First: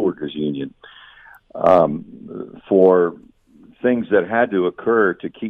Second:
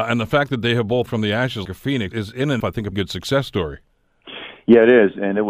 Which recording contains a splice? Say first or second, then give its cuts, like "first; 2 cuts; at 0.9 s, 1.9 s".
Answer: second; 5 cuts; at 1.1 s, 1.6 s, 2.1 s, 2.6 s, 2.9 s